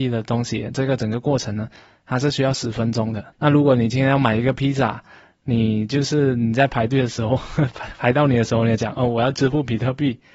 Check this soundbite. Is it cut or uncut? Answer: cut